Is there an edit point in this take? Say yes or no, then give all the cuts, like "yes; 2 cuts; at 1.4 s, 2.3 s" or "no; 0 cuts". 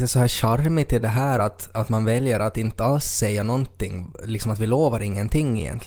no; 0 cuts